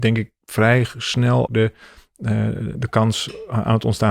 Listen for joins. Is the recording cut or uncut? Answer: cut